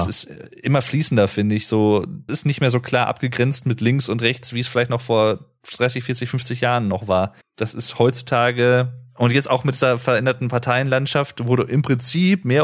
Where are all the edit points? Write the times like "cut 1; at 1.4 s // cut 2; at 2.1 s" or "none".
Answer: cut 1; at 2.3 s // cut 2; at 7.4 s

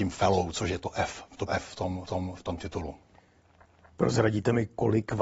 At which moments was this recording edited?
cut 1; at 1.5 s // cut 2; at 2.1 s

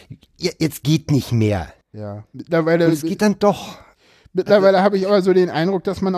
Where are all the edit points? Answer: cut 1; at 1.8 s

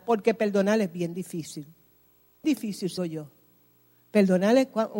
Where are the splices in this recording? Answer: cut 1; at 2.4 s // cut 2; at 3.0 s

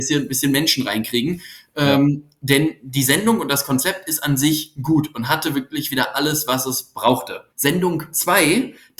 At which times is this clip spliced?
cut 1; at 7.5 s

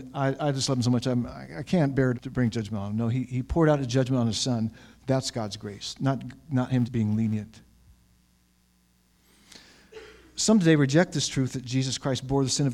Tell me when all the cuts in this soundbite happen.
cut 1; at 2.1 s // cut 2; at 6.8 s

